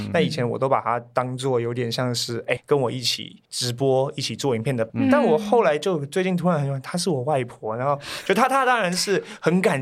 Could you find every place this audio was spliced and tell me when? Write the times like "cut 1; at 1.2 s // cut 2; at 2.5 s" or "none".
cut 1; at 2.6 s // cut 2; at 3.5 s // cut 3; at 4.9 s